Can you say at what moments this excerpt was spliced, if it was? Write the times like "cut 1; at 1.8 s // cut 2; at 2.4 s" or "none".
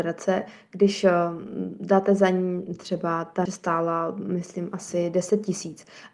cut 1; at 3.5 s